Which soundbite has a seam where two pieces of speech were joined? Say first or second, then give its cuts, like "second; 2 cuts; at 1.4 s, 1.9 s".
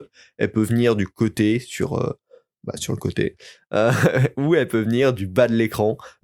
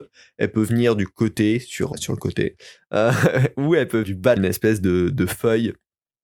second; 3 cuts; at 1.9 s, 4.0 s, 4.4 s